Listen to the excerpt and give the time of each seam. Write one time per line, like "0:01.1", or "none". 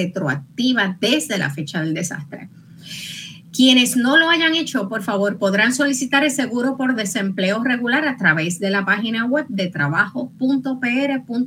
none